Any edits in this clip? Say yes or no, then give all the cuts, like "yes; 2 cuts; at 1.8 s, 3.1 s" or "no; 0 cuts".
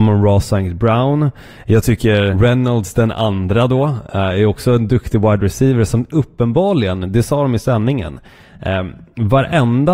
yes; 1 cut; at 2.3 s